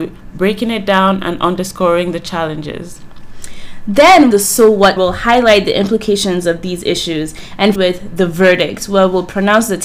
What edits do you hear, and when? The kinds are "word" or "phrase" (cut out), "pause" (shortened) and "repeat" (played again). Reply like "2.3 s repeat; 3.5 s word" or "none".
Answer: 4.3 s phrase; 5.0 s phrase; 7.8 s phrase

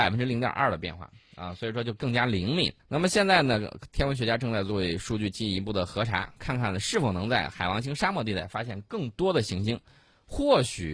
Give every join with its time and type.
2.8 s pause

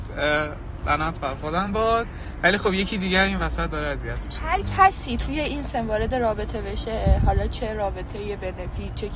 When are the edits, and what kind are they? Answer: none

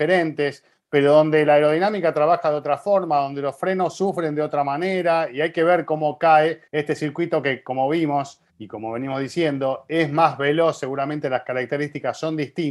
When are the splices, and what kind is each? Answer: 6.7 s pause; 8.5 s pause

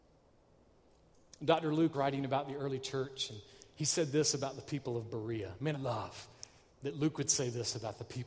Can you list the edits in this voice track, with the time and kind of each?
1.9 s word; 5.7 s word

